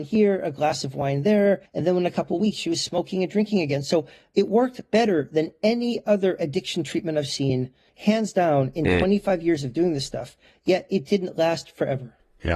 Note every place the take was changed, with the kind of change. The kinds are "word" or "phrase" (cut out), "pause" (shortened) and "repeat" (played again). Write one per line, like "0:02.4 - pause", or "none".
0:01.7 - pause

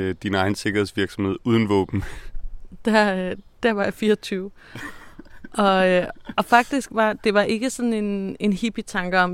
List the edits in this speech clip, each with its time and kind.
none

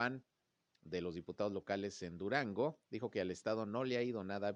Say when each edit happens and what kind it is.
0:02.9 - pause

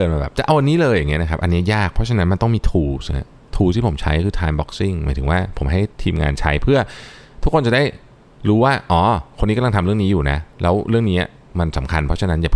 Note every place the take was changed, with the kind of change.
none

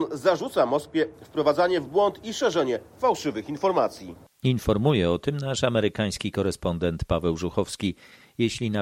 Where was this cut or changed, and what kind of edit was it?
none

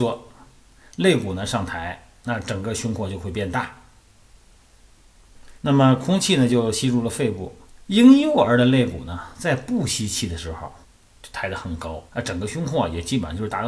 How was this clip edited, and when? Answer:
0:05.6 - pause
0:07.7 - pause
0:10.8 - pause
0:12.1 - pause

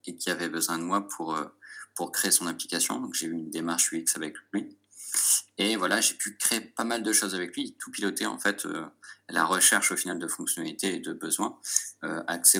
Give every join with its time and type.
none

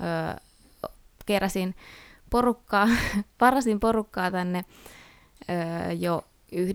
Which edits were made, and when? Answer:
none

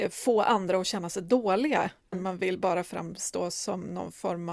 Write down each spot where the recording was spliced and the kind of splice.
0:02.1 - word

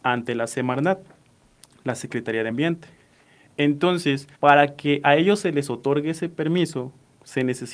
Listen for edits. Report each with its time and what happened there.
0:02.5 - word
0:04.3 - pause

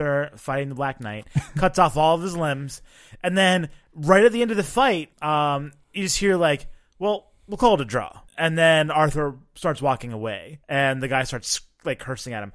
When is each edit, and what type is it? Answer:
0:05.1 - pause
0:08.3 - pause
0:10.6 - pause

